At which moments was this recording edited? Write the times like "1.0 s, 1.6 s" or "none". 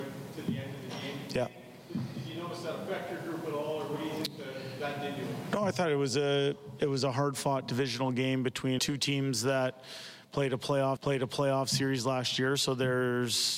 8.8 s, 11.0 s